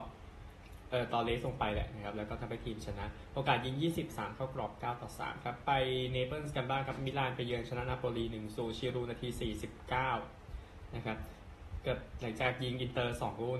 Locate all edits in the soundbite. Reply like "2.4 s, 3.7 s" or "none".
4.1 s